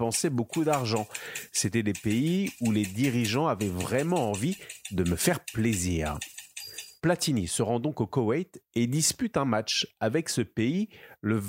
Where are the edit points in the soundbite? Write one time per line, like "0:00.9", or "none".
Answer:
0:07.0